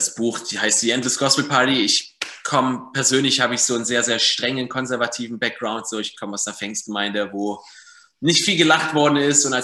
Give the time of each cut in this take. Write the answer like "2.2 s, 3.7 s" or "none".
none